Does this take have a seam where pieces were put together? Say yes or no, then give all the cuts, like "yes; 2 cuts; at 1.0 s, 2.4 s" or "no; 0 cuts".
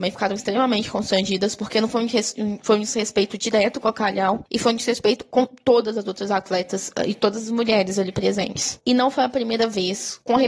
no; 0 cuts